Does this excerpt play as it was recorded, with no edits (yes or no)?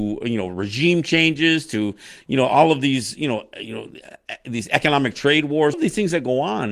no